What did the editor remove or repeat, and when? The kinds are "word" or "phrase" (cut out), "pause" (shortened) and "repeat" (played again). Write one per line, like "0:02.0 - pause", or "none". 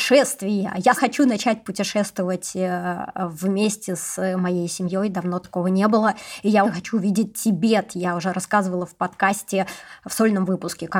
0:01.0 - word
0:06.6 - word